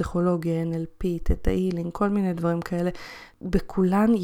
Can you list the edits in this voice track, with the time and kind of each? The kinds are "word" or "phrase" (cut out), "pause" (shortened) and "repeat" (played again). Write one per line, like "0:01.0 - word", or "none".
none